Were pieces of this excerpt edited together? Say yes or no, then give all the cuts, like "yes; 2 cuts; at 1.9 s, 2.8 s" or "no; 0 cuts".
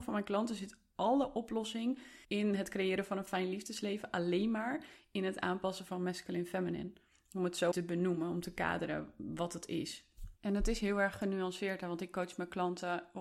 yes; 3 cuts; at 2.2 s, 7.7 s, 10.4 s